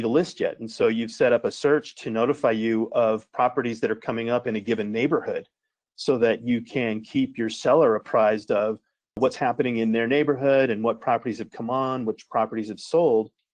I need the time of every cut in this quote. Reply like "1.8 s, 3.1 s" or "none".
none